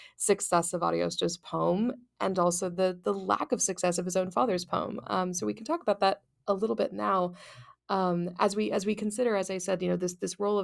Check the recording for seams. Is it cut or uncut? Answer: uncut